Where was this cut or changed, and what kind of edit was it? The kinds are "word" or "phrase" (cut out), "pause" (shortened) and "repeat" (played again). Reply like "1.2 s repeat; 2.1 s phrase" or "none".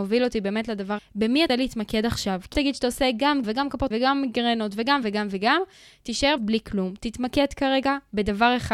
1.0 s word; 1.5 s word; 2.5 s word; 3.4 s word; 3.9 s word; 5.0 s word; 6.4 s word

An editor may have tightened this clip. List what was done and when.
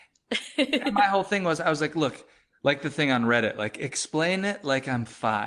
none

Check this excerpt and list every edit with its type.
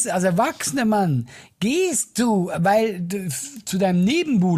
none

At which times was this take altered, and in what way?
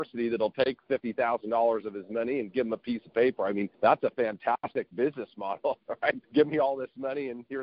3.7 s pause; 6.2 s pause

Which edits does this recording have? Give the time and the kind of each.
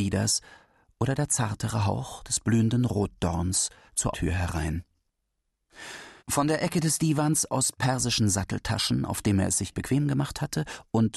4.1 s word; 6.2 s pause

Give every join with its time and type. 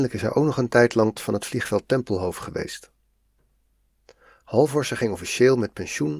1.1 s word

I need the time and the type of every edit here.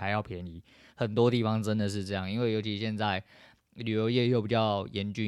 none

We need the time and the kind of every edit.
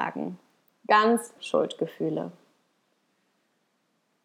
1.4 s word

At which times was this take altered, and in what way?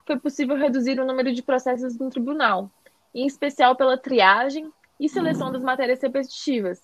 none

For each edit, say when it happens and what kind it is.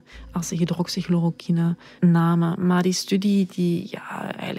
2.0 s word

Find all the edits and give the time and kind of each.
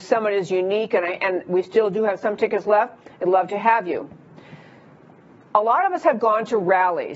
none

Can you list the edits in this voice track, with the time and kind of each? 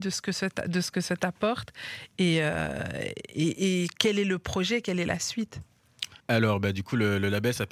6.2 s pause

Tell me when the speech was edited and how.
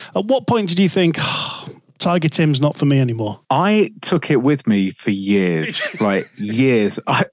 3.4 s pause

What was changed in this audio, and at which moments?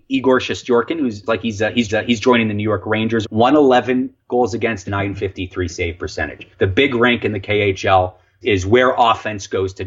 1.3 s word; 1.9 s repeat; 3.2 s word; 4.8 s word; 6.5 s pause; 8.4 s word

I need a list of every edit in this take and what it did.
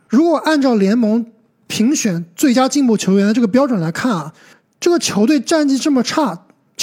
none

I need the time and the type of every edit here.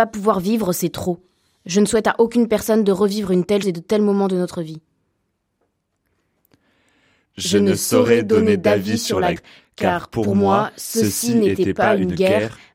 3.6 s word; 9.4 s word

